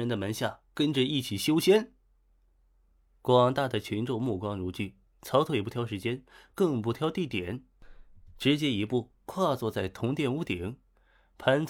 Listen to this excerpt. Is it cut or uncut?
uncut